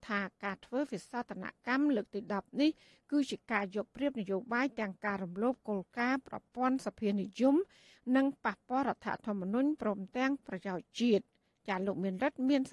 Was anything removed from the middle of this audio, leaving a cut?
no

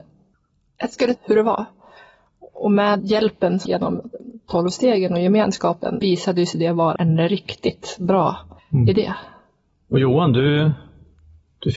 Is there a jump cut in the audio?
yes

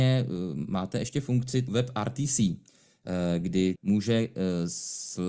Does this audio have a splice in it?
yes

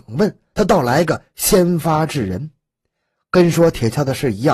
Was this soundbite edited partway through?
no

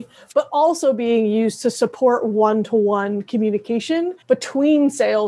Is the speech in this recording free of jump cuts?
no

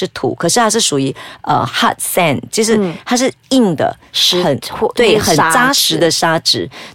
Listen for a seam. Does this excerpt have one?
no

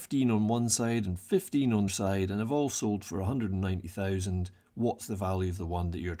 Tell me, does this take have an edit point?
yes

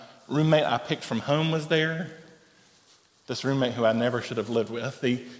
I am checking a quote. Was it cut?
no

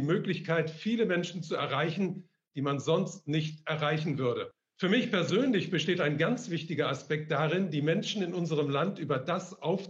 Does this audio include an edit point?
no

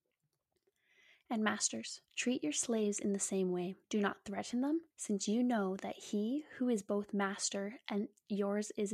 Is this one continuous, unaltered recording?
no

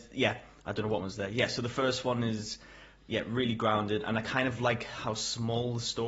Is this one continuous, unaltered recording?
no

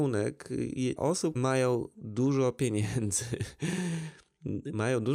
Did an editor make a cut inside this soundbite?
yes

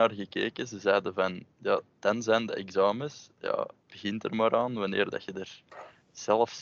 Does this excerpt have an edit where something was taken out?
yes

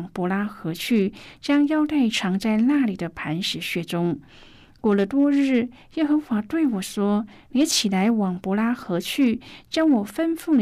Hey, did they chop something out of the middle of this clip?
no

